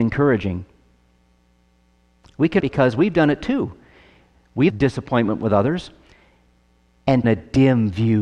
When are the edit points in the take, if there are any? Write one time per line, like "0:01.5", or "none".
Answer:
0:02.6
0:04.7
0:07.2